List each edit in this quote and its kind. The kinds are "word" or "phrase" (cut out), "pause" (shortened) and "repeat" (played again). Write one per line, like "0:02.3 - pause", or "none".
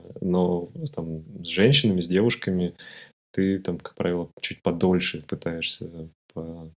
none